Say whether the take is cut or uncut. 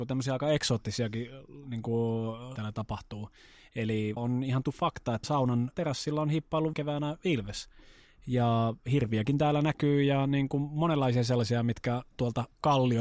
cut